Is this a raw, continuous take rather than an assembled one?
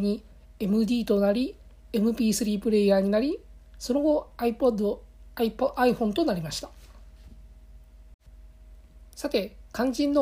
yes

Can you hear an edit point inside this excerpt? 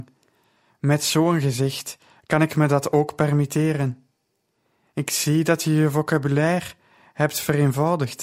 no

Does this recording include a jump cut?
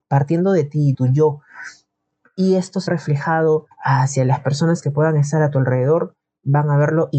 yes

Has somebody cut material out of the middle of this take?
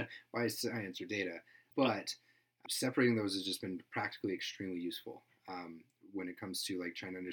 no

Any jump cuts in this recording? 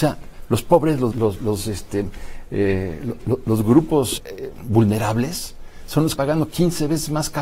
yes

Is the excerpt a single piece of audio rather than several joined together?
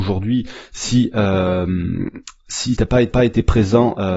no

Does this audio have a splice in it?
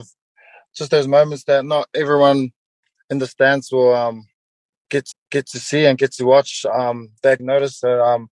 yes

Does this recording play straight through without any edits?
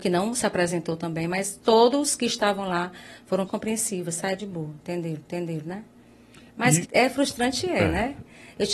no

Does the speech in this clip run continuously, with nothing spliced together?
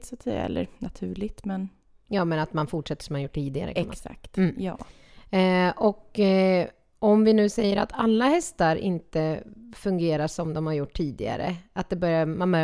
yes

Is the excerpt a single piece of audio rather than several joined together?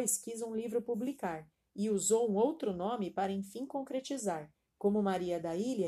yes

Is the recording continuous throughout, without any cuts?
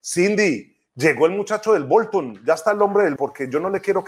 no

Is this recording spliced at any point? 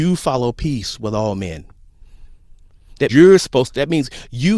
yes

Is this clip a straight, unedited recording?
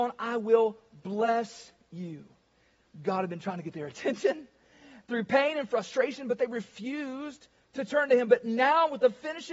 yes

